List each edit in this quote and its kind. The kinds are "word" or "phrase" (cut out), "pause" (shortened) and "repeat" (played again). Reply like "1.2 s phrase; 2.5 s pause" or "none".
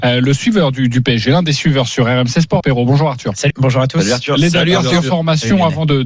2.6 s word; 3.5 s word